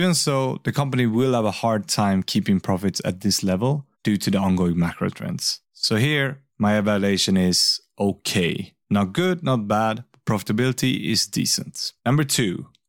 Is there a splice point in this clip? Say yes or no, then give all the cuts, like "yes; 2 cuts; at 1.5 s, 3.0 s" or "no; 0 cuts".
yes; 5 cuts; at 3.9 s, 5.6 s, 6.5 s, 8.8 s, 12.0 s